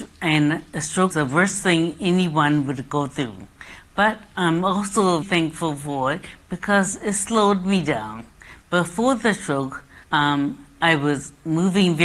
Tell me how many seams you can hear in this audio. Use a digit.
3